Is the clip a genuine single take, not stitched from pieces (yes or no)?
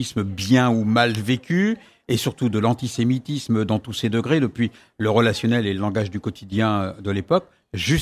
yes